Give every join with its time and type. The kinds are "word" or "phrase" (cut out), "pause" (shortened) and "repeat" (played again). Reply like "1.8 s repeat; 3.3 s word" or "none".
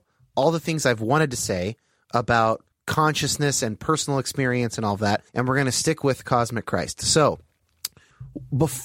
2.7 s pause; 5.3 s pause